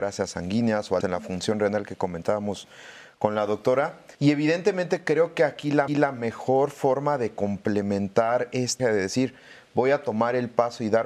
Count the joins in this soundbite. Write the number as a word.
four